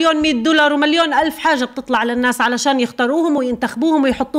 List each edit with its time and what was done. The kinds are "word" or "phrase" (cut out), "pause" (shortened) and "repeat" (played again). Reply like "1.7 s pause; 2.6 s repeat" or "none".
none